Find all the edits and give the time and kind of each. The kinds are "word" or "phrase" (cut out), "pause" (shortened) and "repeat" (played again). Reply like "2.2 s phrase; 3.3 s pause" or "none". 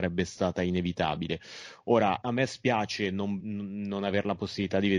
2.2 s word; 3.4 s word